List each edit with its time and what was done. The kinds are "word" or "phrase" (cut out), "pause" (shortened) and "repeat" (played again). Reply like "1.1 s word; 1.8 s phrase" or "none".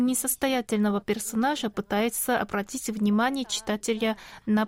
none